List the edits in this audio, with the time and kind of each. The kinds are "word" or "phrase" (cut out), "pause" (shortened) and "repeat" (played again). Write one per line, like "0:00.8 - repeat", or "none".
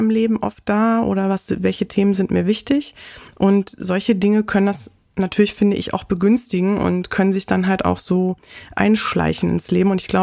none